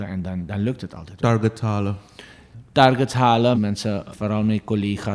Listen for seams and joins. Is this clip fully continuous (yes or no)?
no